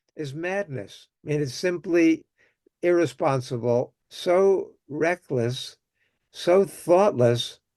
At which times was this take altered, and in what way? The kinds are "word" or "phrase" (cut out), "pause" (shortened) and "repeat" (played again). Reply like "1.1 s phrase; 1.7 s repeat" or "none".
1.2 s pause; 2.8 s word; 4.0 s pause